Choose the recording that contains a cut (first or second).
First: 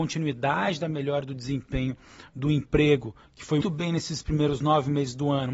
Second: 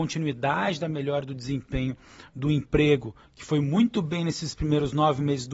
first